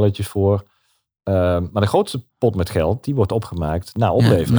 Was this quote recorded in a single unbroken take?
no; 1 cut; at 2.3 s

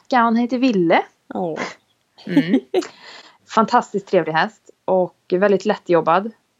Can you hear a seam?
yes; 1 cut; at 3.4 s

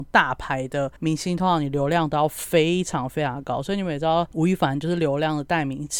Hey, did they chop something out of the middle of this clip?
yes; 1 cut; at 1.0 s

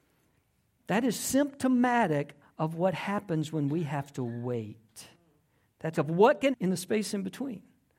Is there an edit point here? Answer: yes; 2 cuts; at 5.9 s, 6.5 s

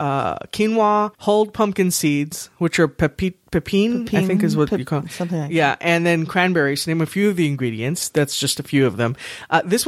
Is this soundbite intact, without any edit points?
no; 1 cut; at 1.1 s

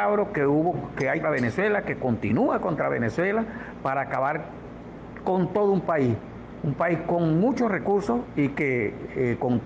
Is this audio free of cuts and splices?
no; 1 cut; at 1.2 s

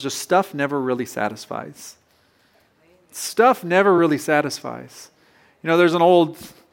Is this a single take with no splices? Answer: yes; 0 cuts

